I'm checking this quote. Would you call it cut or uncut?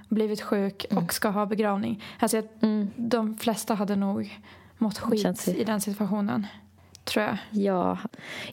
uncut